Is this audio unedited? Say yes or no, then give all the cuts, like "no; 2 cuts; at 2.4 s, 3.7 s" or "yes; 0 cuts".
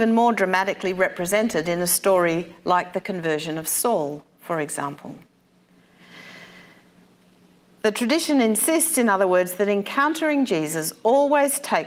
yes; 0 cuts